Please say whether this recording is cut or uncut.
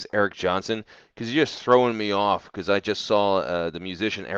uncut